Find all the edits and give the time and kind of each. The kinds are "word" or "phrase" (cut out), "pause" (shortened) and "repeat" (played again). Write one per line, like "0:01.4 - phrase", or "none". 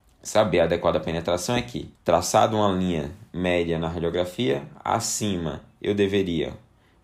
0:01.9 - pause